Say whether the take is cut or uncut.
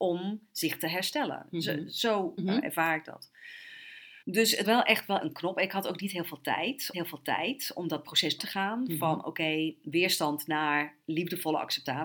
cut